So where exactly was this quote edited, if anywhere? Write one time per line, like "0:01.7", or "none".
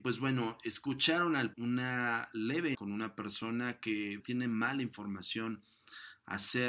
0:01.5
0:02.7
0:04.2